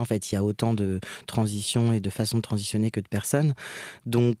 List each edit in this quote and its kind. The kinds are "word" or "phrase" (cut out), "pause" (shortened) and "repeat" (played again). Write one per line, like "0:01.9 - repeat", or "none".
none